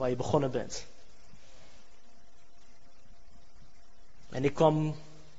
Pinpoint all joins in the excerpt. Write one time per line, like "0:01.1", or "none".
none